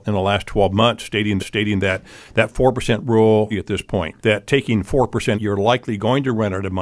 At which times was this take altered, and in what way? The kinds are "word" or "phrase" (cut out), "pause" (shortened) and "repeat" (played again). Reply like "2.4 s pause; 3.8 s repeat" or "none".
1.4 s repeat; 3.5 s phrase; 4.2 s pause; 5.3 s word